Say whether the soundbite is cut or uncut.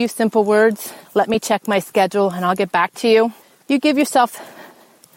cut